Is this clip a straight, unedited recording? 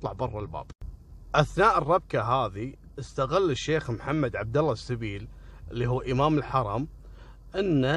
yes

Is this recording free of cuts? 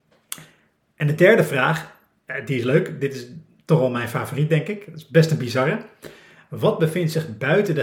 yes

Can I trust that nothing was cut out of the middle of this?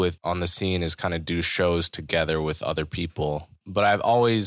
yes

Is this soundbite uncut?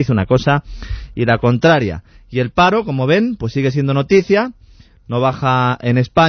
yes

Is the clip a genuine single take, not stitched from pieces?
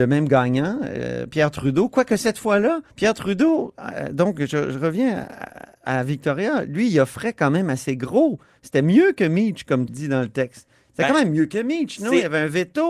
no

